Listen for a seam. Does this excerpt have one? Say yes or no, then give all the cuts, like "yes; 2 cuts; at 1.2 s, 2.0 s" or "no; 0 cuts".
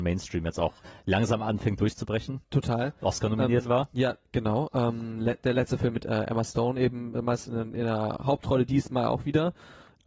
yes; 1 cut; at 2.4 s